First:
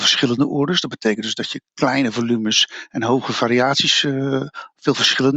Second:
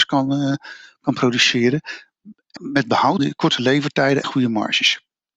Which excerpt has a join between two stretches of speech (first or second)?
second